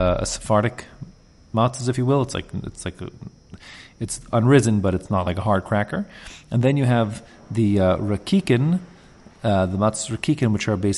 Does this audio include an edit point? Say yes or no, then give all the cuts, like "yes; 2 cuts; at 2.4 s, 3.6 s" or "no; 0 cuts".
no; 0 cuts